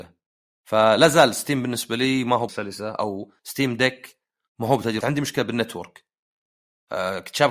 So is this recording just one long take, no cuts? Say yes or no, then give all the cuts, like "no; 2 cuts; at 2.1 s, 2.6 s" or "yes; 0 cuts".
no; 3 cuts; at 2.5 s, 3.4 s, 5.0 s